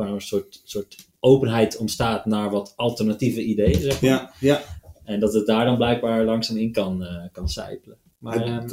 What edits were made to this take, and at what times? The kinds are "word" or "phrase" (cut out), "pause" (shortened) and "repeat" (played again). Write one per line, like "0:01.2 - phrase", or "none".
none

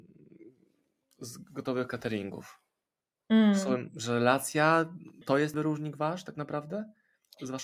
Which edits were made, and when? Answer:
0:05.2 - word
0:05.5 - word

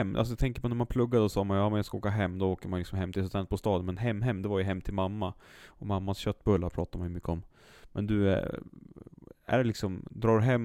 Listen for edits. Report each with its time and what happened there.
none

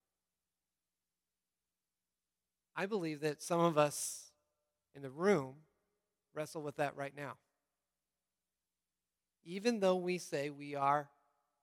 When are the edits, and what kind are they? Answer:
none

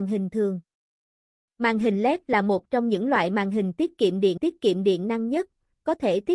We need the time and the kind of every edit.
0:04.4 - repeat

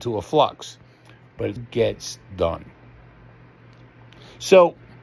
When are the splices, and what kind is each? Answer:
0:01.6 - word

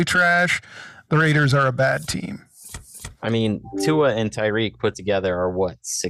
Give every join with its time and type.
none

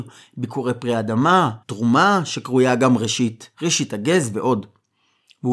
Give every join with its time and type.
0:01.6 - pause
0:03.5 - pause

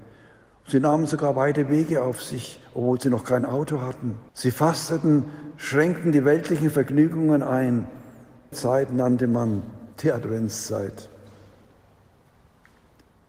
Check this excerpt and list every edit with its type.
0:04.3 - pause
0:08.5 - word
0:09.9 - pause

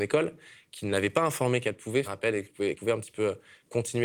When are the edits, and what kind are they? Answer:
0:02.0 - word
0:02.7 - word

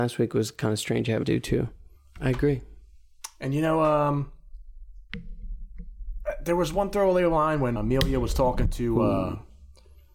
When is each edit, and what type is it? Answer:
0:01.2 - word
0:02.0 - pause
0:07.8 - word

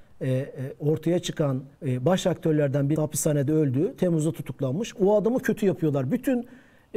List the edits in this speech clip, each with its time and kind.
0:01.7 - pause
0:03.0 - phrase

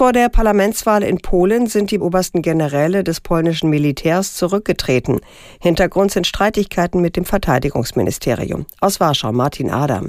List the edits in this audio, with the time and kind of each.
0:02.0 - word

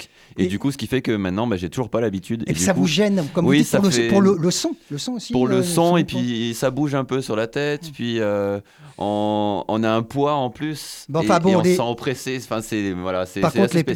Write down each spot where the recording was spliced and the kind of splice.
none

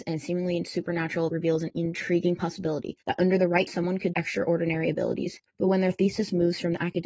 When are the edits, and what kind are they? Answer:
0:01.3 - word
0:03.0 - pause
0:03.7 - word
0:04.1 - word
0:05.5 - pause

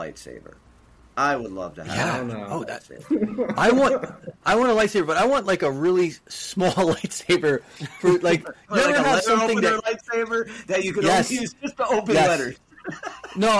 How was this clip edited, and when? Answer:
0:06.2 - pause

